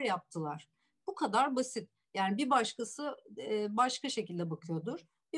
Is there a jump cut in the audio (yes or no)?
no